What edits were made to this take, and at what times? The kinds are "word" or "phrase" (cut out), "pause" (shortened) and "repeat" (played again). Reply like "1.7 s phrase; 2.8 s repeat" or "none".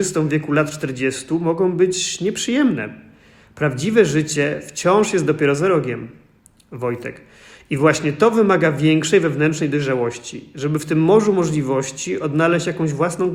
none